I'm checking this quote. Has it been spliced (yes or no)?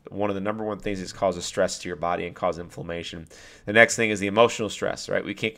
yes